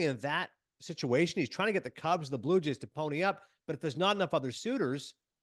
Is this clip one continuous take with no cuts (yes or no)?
yes